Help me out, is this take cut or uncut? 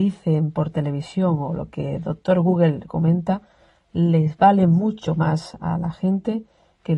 uncut